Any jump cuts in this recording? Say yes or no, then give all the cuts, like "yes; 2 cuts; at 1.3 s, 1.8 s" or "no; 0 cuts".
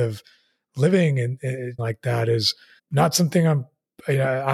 yes; 2 cuts; at 1.8 s, 2.8 s